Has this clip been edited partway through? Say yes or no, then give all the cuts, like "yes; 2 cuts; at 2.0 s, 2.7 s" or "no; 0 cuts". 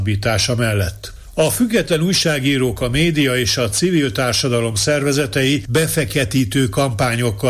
no; 0 cuts